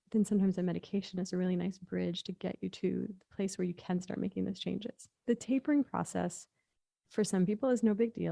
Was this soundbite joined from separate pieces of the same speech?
yes; 1 cut; at 5.2 s

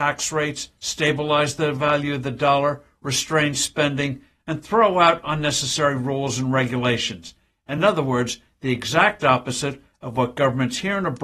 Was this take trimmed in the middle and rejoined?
no; 0 cuts

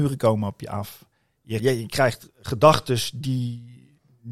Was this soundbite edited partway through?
yes; 1 cut; at 1.6 s

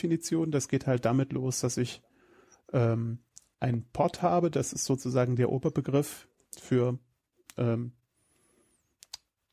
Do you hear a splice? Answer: no; 0 cuts

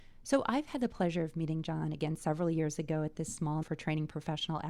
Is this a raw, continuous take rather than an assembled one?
no; 1 cut; at 3.6 s

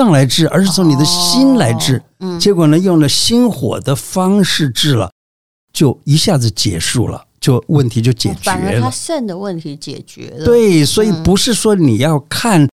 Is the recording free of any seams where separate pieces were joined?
yes; 0 cuts

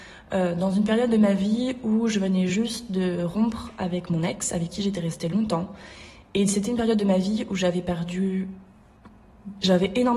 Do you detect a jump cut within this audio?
no; 0 cuts

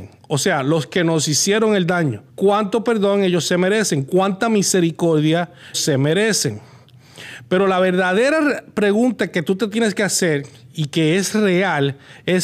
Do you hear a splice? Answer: yes; 2 cuts; at 2.3 s, 5.7 s

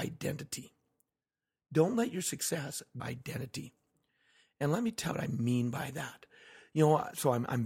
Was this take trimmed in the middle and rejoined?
yes; 2 cuts; at 3.0 s, 5.1 s

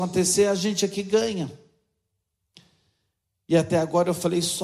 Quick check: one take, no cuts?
yes; 0 cuts

